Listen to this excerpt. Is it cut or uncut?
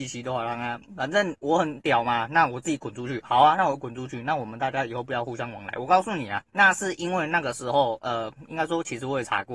cut